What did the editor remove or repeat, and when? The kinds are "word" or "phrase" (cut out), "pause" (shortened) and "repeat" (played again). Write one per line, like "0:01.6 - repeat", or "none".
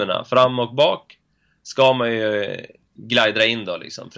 none